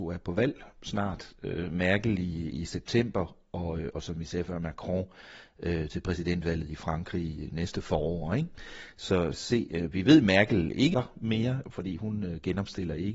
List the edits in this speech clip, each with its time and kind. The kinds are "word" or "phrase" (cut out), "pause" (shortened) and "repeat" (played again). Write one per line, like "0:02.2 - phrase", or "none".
0:09.3 - phrase
0:10.9 - word